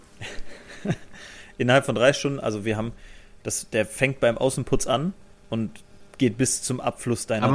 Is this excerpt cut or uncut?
uncut